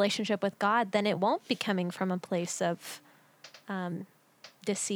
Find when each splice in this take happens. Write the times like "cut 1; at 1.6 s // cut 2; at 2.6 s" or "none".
none